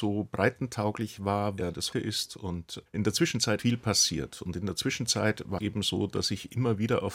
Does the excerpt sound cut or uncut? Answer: cut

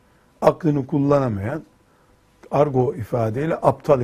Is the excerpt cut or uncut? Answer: uncut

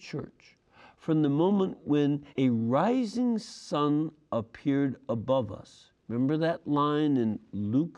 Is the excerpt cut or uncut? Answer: cut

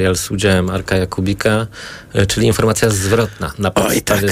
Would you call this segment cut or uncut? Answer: uncut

